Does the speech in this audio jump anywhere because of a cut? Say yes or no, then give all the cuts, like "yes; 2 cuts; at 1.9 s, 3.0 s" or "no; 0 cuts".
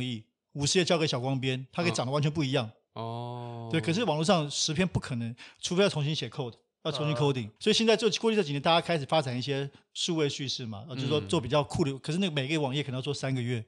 yes; 1 cut; at 7.6 s